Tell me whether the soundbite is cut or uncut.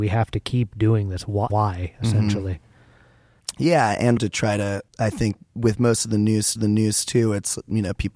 cut